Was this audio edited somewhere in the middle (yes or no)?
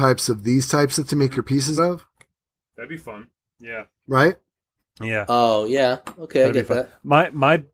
yes